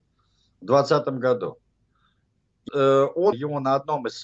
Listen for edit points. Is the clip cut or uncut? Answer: cut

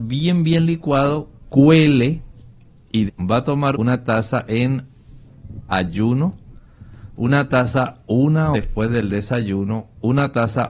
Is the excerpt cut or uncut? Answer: cut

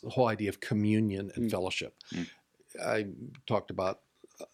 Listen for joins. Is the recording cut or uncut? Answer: uncut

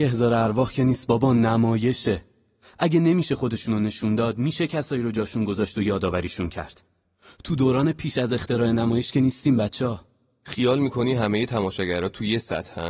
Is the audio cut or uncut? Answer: uncut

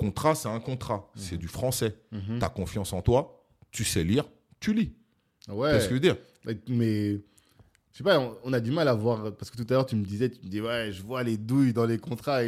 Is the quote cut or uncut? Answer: uncut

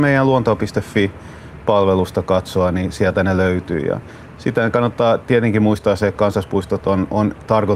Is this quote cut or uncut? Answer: uncut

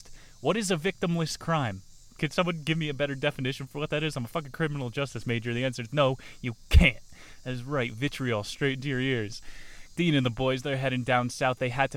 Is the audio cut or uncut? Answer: uncut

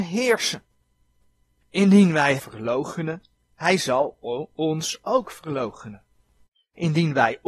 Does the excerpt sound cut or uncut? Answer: cut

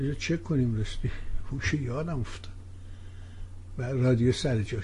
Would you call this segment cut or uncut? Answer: uncut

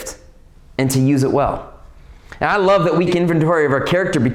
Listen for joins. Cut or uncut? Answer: cut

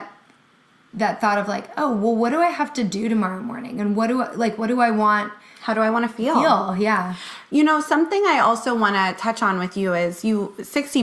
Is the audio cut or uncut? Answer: uncut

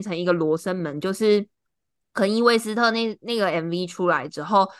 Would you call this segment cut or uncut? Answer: uncut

